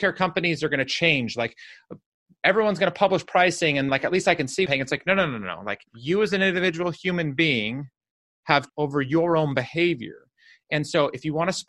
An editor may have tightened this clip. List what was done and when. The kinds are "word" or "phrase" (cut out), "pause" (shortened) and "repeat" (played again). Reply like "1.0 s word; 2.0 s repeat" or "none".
3.9 s word; 4.7 s phrase; 5.8 s pause; 8.7 s word